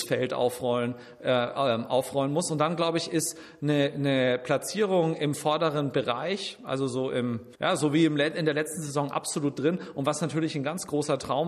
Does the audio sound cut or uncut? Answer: cut